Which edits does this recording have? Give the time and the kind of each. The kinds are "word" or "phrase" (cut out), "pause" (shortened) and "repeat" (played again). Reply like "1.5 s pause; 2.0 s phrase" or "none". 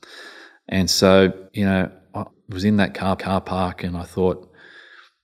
1.5 s pause; 2.3 s phrase; 3.2 s repeat